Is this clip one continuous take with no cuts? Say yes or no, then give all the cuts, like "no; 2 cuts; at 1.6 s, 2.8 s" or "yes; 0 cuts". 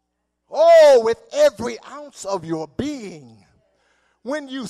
yes; 0 cuts